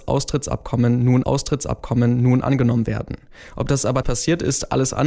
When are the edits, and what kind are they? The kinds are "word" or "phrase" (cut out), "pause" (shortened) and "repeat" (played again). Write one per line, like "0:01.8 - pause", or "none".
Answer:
0:01.2 - repeat
0:04.0 - word